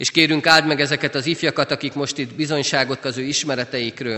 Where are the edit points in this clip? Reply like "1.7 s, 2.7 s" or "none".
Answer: 3.0 s